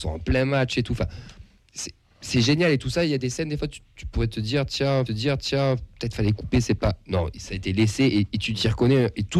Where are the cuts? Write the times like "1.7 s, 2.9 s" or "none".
5.1 s